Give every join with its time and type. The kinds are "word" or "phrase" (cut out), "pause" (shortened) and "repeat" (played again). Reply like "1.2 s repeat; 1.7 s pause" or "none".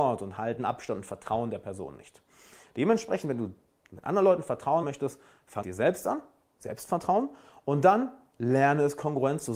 4.8 s word; 5.6 s word